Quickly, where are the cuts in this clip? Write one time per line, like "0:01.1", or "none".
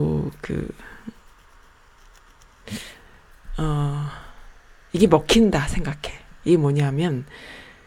none